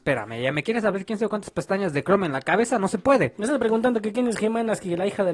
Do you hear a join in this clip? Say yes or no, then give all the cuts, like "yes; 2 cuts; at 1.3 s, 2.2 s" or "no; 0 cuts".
no; 0 cuts